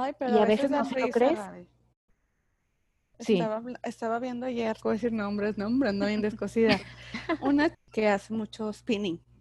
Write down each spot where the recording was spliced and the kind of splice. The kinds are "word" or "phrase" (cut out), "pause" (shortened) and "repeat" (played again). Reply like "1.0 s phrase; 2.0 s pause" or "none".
4.8 s word; 7.7 s word